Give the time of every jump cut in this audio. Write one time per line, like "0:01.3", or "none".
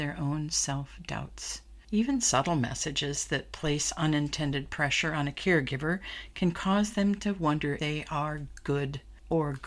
0:07.8